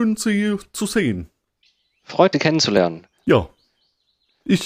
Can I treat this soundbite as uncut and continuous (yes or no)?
no